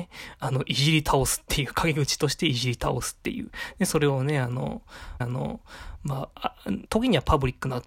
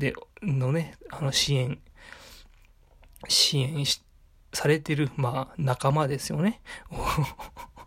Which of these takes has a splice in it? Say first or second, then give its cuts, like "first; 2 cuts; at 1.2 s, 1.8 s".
first; 2 cuts; at 5.2 s, 6.9 s